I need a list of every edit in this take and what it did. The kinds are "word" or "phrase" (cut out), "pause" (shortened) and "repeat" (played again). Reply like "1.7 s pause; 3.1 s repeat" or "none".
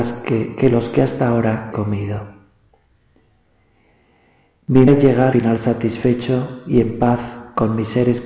1.7 s word; 4.9 s word; 5.3 s word